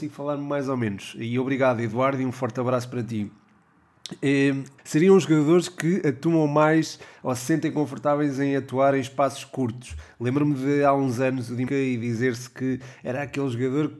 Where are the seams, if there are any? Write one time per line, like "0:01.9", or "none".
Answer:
0:04.8
0:11.7